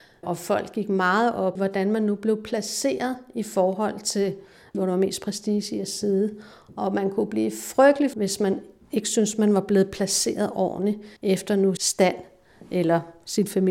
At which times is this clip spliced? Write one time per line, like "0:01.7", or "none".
0:01.6
0:08.1
0:11.2
0:11.8